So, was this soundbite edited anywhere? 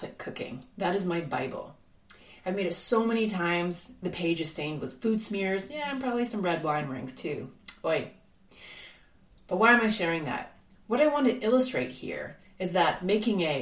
no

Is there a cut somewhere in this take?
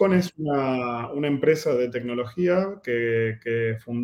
no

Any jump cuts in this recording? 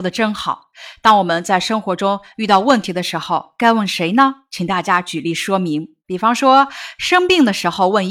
yes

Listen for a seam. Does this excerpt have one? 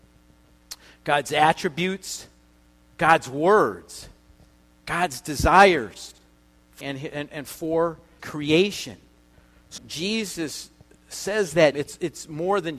yes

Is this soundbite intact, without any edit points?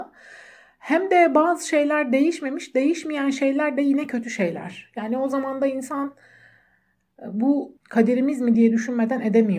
yes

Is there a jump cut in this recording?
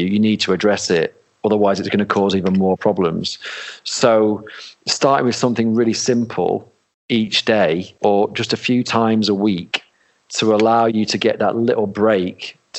no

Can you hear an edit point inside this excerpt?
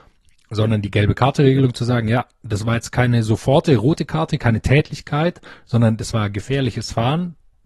no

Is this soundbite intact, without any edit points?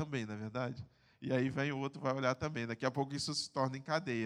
yes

